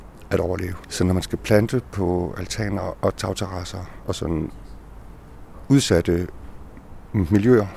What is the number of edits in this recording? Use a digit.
0